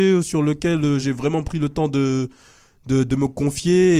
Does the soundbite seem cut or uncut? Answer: uncut